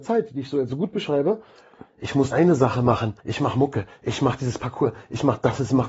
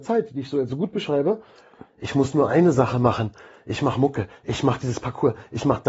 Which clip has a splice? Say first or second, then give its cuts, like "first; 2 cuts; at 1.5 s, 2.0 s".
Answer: first; 2 cuts; at 2.3 s, 3.2 s